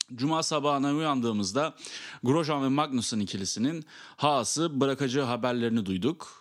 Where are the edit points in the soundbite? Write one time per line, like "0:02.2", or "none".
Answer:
none